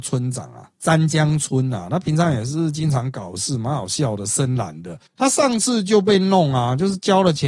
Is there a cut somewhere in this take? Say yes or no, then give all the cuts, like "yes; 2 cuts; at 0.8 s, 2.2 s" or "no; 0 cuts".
yes; 1 cut; at 5.1 s